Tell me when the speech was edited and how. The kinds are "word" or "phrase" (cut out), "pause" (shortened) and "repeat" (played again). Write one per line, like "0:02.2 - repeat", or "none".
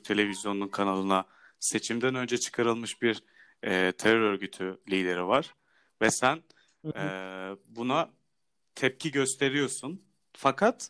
none